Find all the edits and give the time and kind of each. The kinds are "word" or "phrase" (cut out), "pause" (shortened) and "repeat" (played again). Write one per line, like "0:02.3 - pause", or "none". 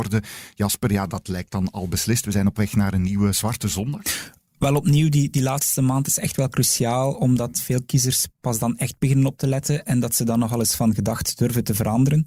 none